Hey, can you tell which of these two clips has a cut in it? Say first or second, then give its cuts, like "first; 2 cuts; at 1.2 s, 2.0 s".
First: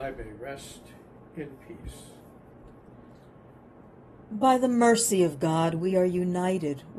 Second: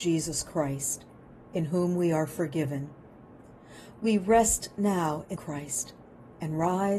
second; 1 cut; at 5.4 s